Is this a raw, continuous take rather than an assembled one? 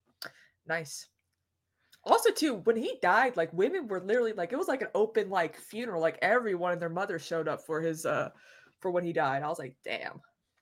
yes; 0 cuts

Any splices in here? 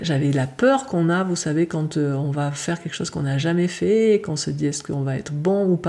no; 0 cuts

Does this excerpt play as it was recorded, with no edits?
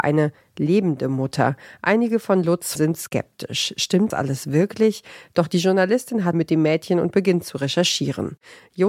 no; 3 cuts; at 2.8 s, 4.1 s, 6.3 s

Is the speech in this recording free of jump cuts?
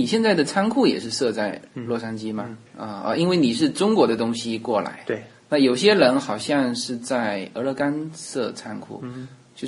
no; 1 cut; at 2.7 s

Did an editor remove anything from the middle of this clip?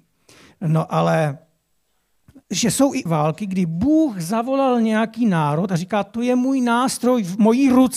yes; 2 cuts; at 2.4 s, 3.1 s

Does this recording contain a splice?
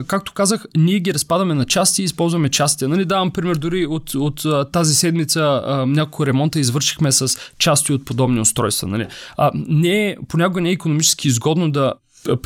no; 0 cuts

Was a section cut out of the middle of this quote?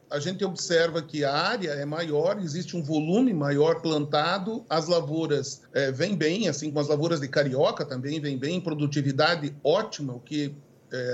yes; 1 cut; at 5.7 s

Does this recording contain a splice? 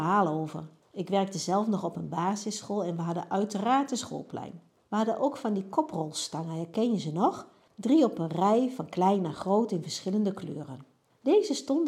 no; 0 cuts

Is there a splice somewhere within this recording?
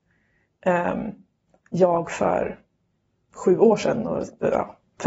no; 0 cuts

